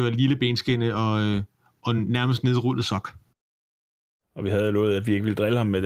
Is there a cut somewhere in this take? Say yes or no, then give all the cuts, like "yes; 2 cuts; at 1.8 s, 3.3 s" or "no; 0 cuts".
no; 0 cuts